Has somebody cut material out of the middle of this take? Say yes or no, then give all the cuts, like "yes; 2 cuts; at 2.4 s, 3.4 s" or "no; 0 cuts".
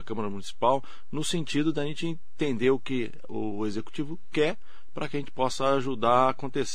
no; 0 cuts